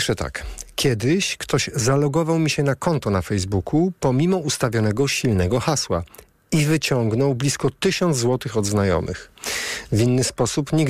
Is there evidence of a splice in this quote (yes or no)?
no